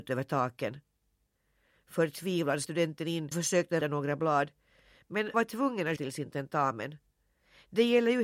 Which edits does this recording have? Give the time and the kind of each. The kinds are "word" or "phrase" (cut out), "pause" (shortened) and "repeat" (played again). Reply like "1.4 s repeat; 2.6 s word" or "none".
2.6 s word; 3.3 s word; 3.8 s word; 5.3 s word; 6.0 s word